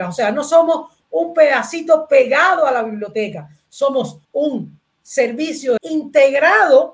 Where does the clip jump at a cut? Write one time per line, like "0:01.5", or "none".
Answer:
0:04.2
0:05.8